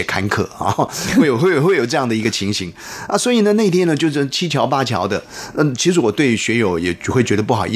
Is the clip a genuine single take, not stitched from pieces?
yes; 0 cuts

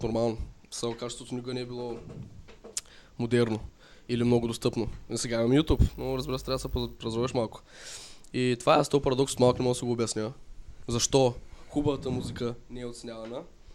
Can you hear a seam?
no; 0 cuts

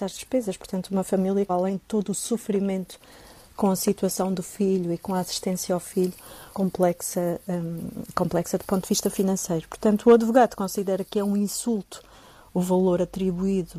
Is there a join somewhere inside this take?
yes; 2 cuts; at 1.5 s, 6.5 s

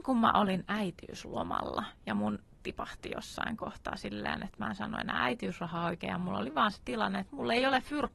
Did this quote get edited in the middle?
yes; 1 cut; at 2.6 s

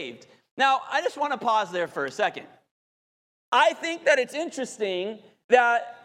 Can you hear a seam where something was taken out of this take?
no; 0 cuts

